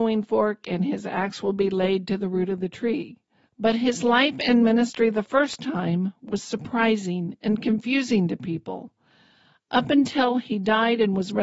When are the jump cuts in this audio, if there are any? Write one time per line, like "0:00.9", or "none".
0:03.5